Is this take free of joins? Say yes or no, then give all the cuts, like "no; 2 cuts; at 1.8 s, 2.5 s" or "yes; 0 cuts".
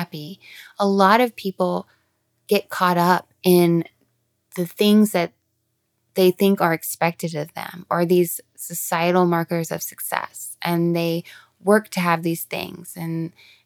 yes; 0 cuts